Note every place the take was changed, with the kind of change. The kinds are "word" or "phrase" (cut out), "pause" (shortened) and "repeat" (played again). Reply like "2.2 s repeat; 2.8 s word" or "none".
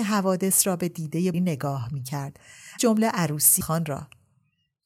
1.3 s word; 2.8 s word; 3.6 s word